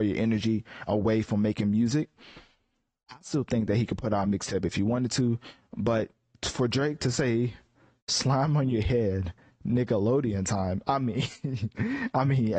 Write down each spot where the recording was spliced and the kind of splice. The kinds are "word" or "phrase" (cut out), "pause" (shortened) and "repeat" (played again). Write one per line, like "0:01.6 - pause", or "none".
none